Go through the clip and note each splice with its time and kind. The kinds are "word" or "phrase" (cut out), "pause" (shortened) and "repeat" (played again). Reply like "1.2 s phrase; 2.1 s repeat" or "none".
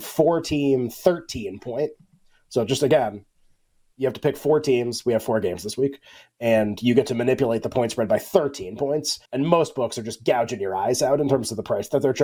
9.2 s pause